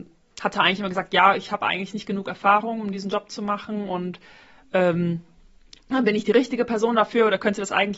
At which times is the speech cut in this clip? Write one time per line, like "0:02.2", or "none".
none